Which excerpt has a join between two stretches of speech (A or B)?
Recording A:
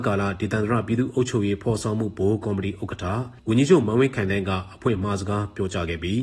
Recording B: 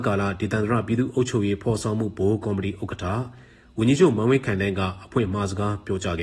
A